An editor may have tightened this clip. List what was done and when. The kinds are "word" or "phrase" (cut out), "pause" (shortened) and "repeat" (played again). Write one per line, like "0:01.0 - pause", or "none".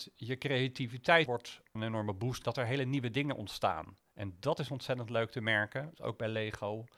0:01.3 - word
0:01.8 - phrase
0:02.4 - phrase

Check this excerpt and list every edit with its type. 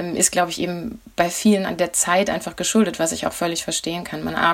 none

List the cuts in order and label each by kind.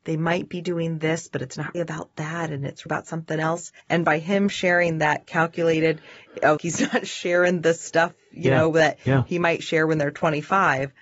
0:01.7 - word
0:02.9 - word
0:03.8 - pause
0:06.6 - phrase

